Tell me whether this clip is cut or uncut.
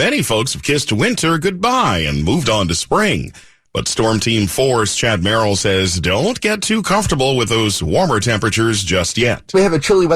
uncut